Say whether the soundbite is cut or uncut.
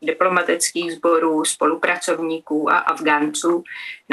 uncut